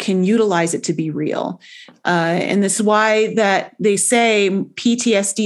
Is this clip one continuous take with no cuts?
yes; 0 cuts

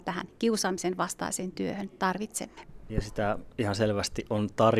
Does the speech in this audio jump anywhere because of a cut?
no; 0 cuts

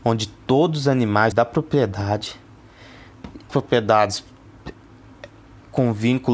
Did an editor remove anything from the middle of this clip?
yes; 2 cuts; at 1.3 s, 3.5 s

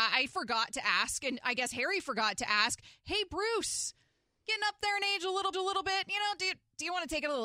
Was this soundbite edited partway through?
yes; 1 cut; at 5.5 s

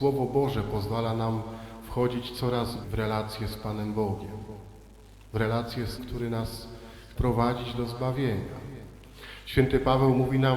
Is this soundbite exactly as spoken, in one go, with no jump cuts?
no; 3 cuts; at 2.8 s, 6.0 s, 7.2 s

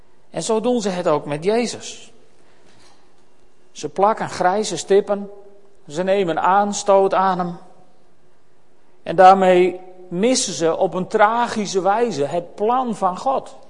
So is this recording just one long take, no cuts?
yes; 0 cuts

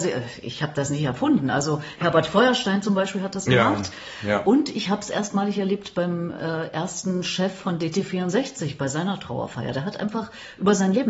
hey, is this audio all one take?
yes; 0 cuts

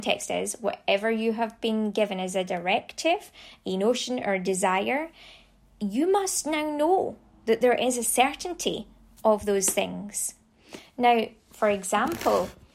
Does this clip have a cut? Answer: no; 0 cuts

